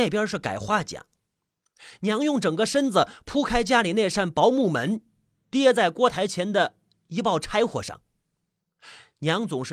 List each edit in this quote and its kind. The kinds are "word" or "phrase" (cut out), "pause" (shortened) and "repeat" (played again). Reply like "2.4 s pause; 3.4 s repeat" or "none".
none

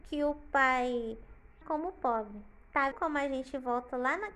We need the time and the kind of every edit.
1.6 s word; 2.9 s word

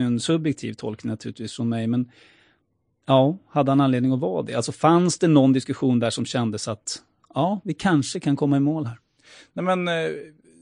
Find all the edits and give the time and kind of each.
none

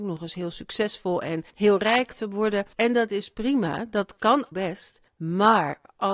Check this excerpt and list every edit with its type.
1.5 s pause; 2.7 s pause; 4.5 s word; 5.1 s pause

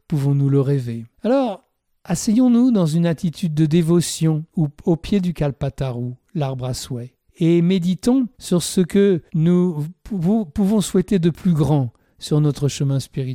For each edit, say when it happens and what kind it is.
1.1 s pause; 4.5 s pause; 7.3 s pause; 8.3 s pause; 9.3 s pause

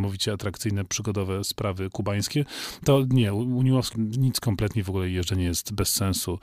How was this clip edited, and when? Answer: 3.9 s phrase

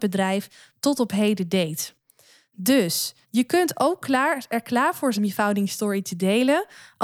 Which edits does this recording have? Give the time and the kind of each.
3.2 s pause; 5.2 s word

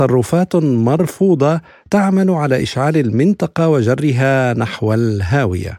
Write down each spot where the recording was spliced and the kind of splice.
none

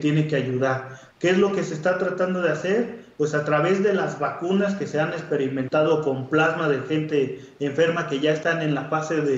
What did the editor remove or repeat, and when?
none

